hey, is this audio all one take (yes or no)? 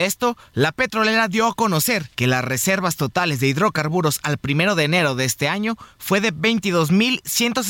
no